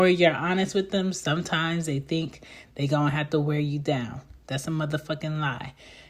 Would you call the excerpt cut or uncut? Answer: uncut